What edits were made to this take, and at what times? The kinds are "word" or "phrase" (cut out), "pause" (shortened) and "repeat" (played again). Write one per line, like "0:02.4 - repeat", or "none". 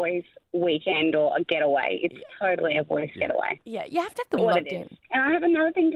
0:04.4 - word
0:05.0 - pause